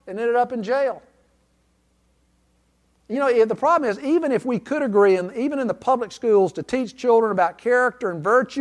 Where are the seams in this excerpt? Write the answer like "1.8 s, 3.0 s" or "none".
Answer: none